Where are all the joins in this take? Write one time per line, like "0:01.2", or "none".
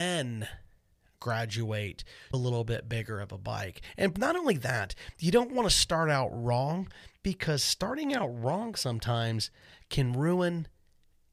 0:02.3